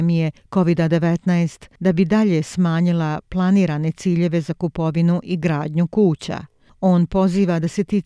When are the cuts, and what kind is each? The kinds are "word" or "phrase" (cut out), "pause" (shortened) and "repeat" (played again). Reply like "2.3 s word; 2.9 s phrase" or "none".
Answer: none